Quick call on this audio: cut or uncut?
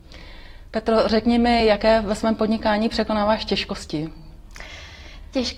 uncut